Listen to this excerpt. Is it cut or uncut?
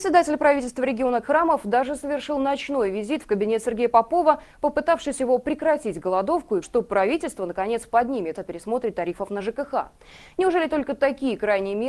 cut